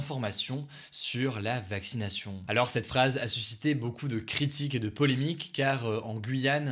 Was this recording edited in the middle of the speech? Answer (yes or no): no